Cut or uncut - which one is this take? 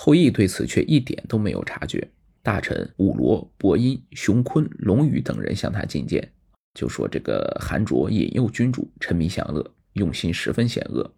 uncut